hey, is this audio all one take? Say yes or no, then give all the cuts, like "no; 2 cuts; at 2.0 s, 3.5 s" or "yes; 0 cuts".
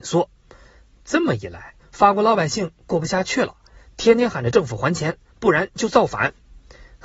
no; 1 cut; at 1.8 s